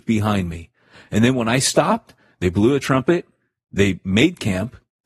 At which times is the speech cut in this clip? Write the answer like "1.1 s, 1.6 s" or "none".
none